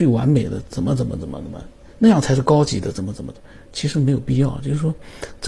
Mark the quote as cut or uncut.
uncut